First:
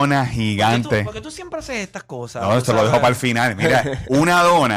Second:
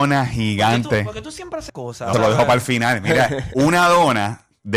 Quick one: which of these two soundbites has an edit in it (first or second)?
second